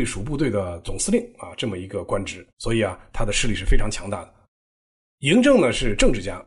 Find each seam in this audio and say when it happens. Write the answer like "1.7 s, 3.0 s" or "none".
2.5 s

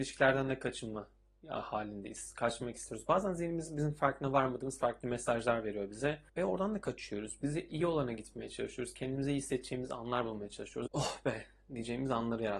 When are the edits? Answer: 6.3 s, 10.9 s

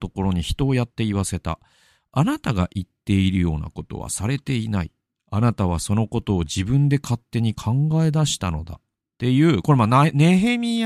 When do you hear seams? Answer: none

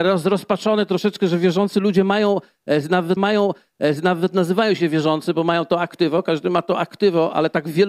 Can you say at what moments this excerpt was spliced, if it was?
3.2 s

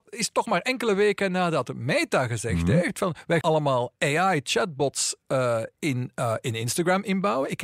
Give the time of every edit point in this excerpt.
3.4 s

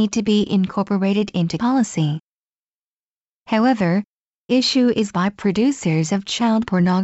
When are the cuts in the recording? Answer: 1.6 s, 4.5 s, 5.1 s

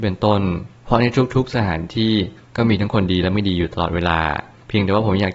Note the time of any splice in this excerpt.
none

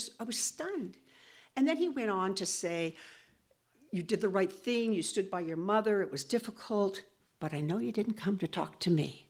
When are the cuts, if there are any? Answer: none

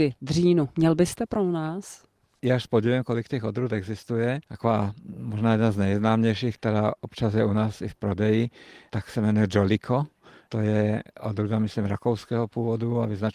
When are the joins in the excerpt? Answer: 4.4 s

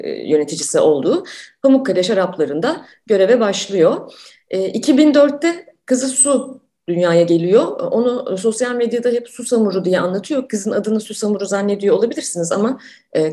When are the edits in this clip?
none

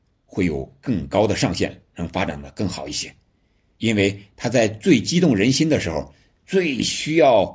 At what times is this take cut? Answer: none

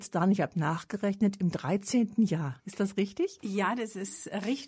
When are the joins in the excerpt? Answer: 2.6 s

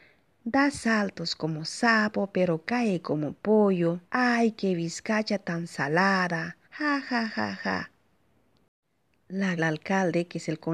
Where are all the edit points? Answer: 4.1 s, 6.6 s, 9.6 s

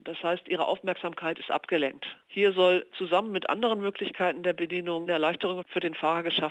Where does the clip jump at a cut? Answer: 2.2 s, 5.1 s

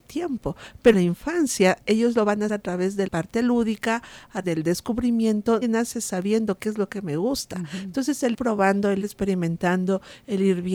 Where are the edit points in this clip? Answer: 0.9 s, 2.5 s, 3.1 s, 4.4 s, 5.6 s, 8.3 s, 9.0 s

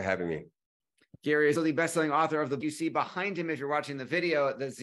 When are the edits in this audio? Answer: 1.5 s, 2.6 s

